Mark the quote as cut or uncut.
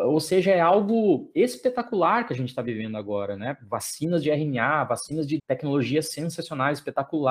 cut